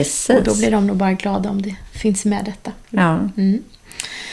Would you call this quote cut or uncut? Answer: uncut